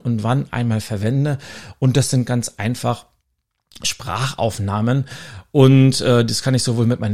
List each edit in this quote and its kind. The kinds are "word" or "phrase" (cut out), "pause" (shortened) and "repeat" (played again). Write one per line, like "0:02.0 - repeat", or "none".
none